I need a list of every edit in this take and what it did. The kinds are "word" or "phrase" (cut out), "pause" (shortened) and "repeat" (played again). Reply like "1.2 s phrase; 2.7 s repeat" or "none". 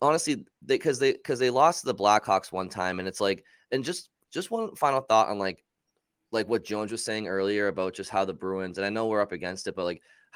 none

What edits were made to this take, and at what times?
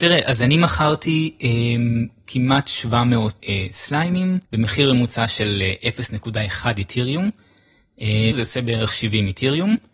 3.4 s word; 4.4 s pause; 8.3 s phrase

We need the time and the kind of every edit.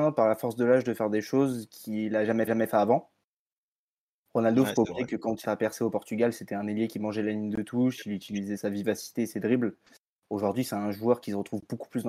2.5 s repeat; 5.4 s phrase; 8.6 s word

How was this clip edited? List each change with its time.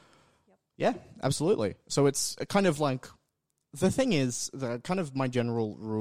none

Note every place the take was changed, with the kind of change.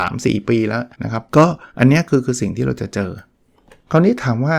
0.9 s pause; 1.3 s pause; 1.7 s pause

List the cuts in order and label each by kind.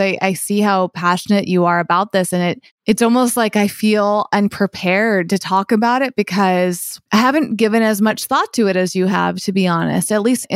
7.1 s pause

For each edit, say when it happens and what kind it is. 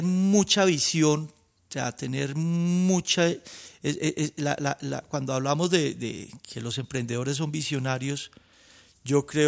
none

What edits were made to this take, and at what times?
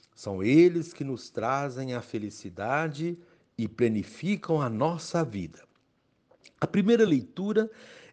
none

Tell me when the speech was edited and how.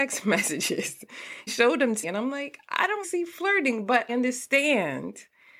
1.5 s word; 2.0 s word; 3.0 s word; 4.1 s word

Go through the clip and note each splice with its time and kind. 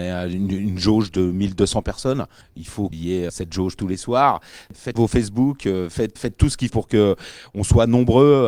2.9 s word; 3.3 s word; 3.8 s word; 5.0 s word; 6.2 s word; 6.7 s word

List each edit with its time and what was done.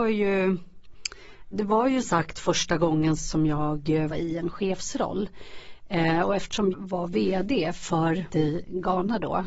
1.5 s word; 2.0 s word; 3.2 s word; 4.1 s word; 6.7 s word; 8.3 s word

